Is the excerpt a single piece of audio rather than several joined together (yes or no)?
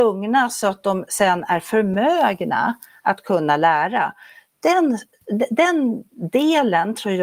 yes